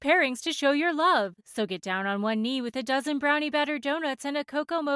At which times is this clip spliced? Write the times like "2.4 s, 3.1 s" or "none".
none